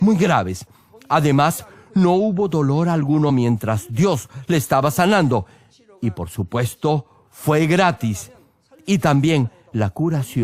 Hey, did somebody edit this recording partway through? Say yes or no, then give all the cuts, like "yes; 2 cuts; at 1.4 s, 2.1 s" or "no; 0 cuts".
no; 0 cuts